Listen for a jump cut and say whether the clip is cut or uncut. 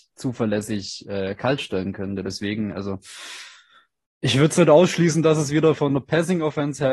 uncut